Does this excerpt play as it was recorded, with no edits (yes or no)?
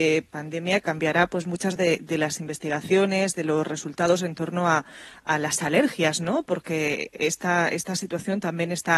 yes